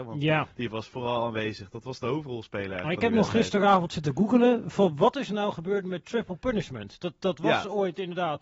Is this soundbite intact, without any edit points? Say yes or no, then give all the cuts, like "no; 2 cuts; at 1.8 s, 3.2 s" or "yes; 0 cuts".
yes; 0 cuts